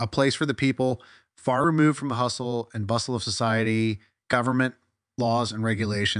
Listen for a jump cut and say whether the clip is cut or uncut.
uncut